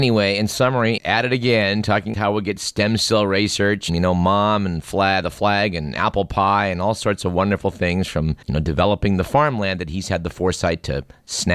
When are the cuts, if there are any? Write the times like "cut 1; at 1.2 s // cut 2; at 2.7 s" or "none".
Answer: cut 1; at 1.0 s // cut 2; at 2.1 s // cut 3; at 3.9 s // cut 4; at 8.4 s